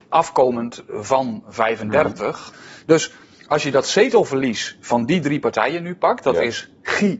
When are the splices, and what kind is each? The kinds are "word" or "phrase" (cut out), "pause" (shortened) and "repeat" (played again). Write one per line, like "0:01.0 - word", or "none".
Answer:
none